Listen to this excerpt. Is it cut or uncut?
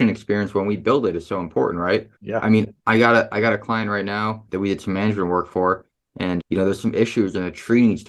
cut